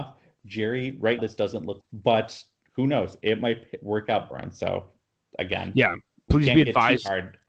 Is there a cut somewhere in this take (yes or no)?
yes